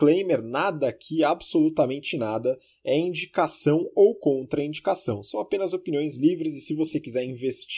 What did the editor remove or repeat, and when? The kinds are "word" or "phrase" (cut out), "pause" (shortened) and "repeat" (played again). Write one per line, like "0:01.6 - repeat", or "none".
none